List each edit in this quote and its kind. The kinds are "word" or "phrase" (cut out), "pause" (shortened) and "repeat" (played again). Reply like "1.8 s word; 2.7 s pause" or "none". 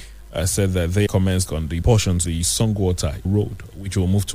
1.1 s word; 1.4 s word; 1.8 s word; 2.2 s word; 3.2 s word